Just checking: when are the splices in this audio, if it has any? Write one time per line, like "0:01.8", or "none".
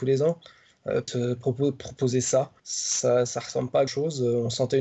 0:01.1
0:02.6
0:03.9